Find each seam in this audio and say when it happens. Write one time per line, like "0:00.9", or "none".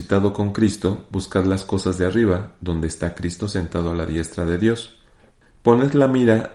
none